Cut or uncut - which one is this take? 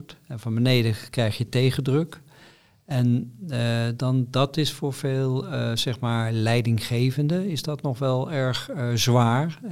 uncut